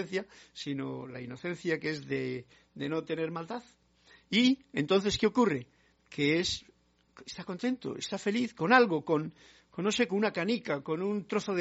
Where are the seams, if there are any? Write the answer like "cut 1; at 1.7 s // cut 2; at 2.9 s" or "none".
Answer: none